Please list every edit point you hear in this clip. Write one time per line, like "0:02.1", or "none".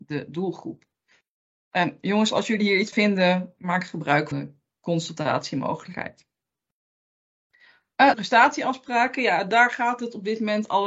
0:02.9
0:04.3
0:08.1